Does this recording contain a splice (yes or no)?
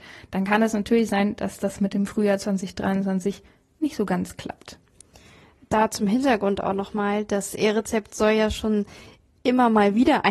no